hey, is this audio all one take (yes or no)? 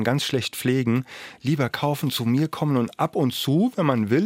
no